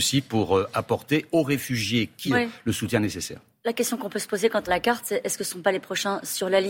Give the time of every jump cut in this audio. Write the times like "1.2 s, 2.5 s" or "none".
2.3 s, 4.7 s